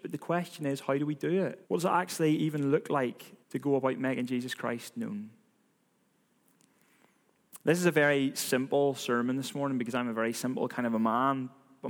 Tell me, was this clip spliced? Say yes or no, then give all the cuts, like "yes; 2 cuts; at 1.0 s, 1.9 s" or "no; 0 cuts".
yes; 2 cuts; at 1.6 s, 3.4 s